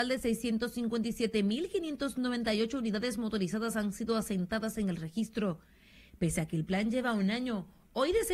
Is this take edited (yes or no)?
no